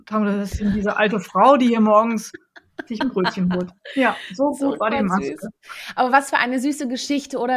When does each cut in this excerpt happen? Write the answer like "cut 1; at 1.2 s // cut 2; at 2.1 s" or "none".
none